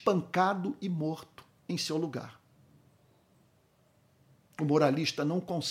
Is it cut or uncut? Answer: uncut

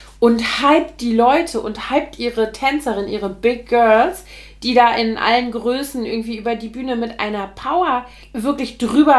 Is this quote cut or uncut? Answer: cut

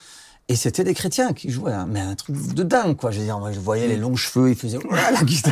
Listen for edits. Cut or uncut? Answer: uncut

